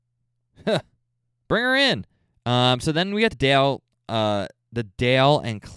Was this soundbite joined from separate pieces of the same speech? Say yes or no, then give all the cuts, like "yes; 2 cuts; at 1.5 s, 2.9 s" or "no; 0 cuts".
yes; 2 cuts; at 2.2 s, 3.3 s